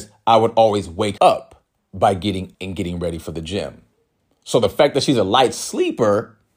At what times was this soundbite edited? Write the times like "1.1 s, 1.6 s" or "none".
1.2 s, 1.8 s, 2.5 s